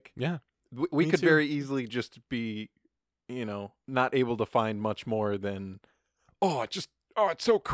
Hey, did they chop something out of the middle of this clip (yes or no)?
no